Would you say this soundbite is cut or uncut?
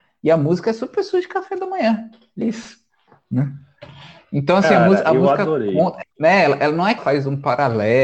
cut